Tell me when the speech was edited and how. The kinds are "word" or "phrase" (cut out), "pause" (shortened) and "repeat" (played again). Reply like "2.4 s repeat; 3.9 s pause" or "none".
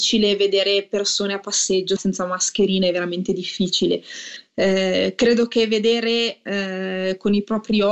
2.0 s word